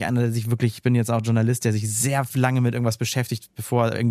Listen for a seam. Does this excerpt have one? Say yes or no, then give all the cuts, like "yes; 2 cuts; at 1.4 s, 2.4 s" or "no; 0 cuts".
no; 0 cuts